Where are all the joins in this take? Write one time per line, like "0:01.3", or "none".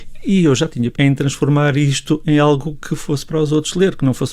0:00.9

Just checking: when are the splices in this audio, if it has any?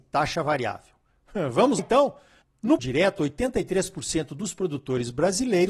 0:01.8
0:02.8

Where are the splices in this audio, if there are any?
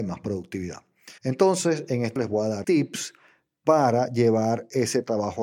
0:01.2
0:02.2
0:02.6

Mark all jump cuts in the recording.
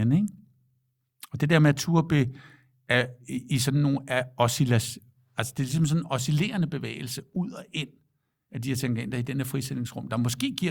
none

